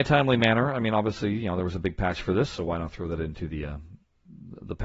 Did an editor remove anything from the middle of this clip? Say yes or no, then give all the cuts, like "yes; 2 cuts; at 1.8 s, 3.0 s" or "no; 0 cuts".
no; 0 cuts